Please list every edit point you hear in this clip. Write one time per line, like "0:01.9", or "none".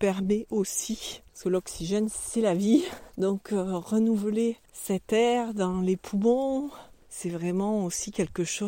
0:04.7